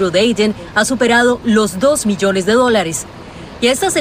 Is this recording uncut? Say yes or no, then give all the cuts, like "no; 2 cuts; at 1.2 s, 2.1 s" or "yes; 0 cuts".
yes; 0 cuts